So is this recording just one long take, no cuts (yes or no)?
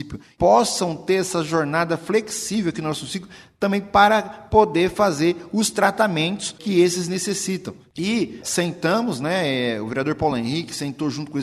yes